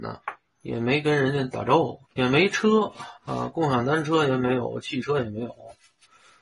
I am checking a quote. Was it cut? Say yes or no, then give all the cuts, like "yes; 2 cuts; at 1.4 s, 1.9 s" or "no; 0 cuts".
yes; 2 cuts; at 2.0 s, 3.2 s